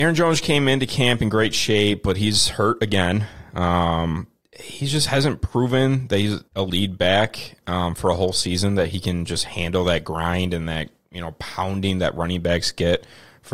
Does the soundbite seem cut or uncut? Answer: cut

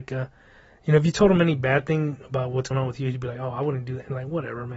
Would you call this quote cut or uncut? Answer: cut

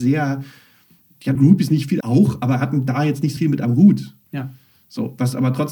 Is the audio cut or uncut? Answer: cut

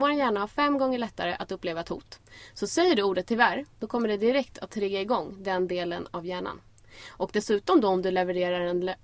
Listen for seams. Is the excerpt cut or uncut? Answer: cut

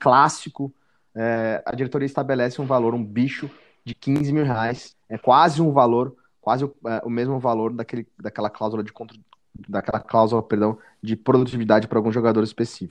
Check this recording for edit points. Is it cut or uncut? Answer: uncut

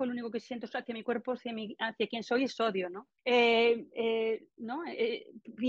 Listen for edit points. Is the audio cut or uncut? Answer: cut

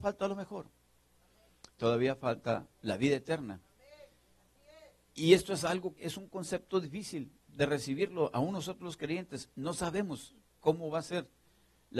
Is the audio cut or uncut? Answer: cut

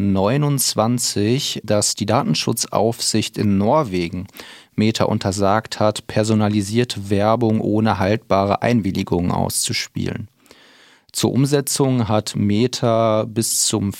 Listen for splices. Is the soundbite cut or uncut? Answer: uncut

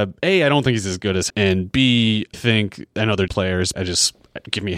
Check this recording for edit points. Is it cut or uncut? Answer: cut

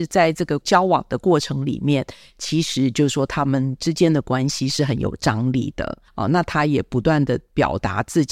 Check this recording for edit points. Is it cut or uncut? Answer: cut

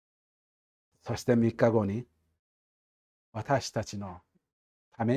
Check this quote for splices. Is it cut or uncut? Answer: uncut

